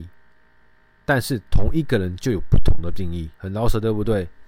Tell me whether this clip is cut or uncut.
cut